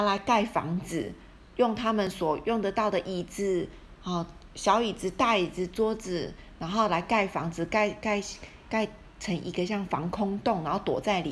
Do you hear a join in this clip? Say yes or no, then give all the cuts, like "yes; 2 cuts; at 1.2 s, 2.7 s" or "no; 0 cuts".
no; 0 cuts